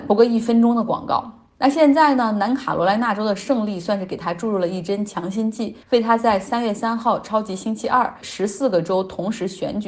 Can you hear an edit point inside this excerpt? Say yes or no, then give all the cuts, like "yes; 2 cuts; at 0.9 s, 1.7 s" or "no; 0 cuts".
yes; 1 cut; at 5.8 s